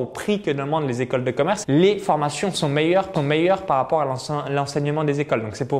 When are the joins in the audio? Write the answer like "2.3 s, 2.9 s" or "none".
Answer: 1.6 s, 3.1 s